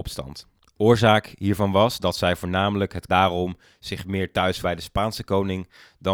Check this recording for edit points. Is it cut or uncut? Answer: cut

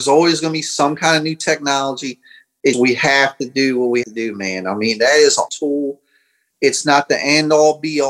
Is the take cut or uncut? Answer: cut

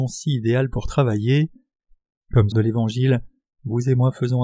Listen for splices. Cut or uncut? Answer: cut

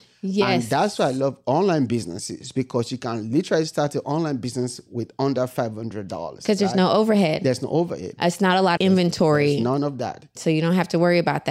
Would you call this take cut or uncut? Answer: cut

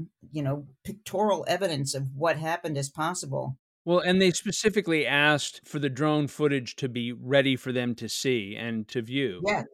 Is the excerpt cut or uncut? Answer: uncut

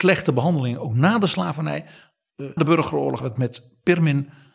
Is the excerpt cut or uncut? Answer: cut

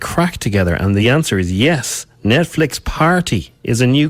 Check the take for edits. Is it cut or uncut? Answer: uncut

